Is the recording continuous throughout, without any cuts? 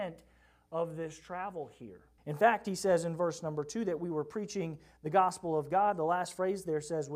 no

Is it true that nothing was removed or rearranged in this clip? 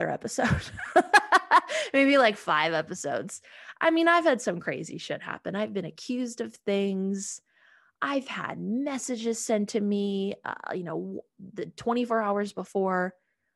yes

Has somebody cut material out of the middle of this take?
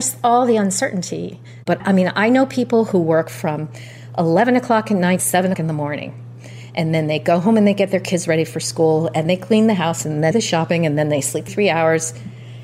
yes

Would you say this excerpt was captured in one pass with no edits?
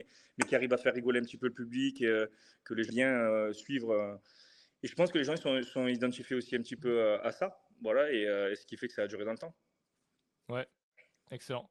no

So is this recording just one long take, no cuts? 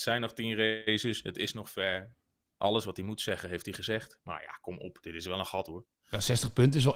yes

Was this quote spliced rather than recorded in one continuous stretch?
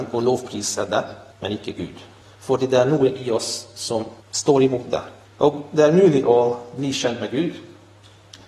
yes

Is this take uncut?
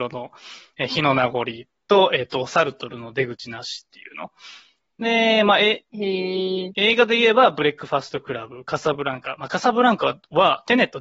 yes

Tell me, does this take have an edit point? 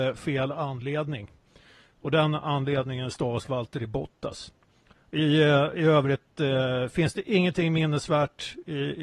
no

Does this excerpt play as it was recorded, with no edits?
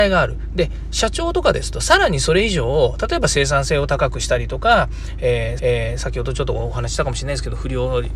no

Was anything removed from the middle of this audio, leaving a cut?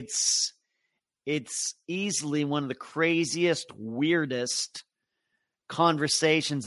no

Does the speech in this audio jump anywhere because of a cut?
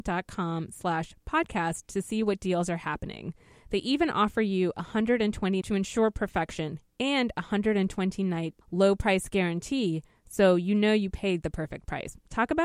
yes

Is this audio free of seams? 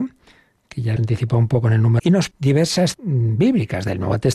no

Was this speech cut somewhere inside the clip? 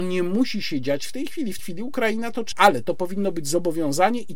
yes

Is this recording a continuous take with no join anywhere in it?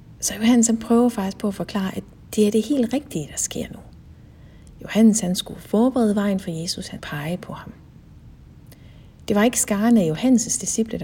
no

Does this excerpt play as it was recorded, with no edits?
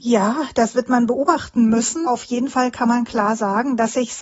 no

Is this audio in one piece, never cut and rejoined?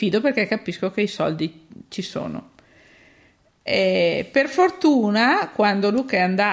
yes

